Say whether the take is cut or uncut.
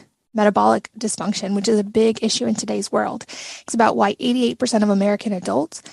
cut